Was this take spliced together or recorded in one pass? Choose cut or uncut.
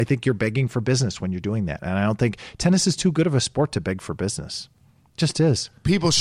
uncut